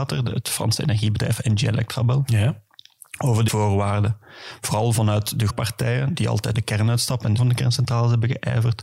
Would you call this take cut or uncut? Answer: cut